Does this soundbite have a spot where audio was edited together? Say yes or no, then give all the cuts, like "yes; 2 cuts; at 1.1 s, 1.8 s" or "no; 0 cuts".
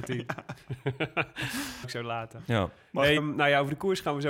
yes; 2 cuts; at 1.8 s, 3.2 s